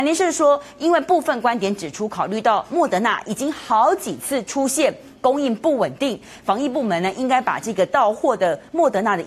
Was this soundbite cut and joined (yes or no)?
no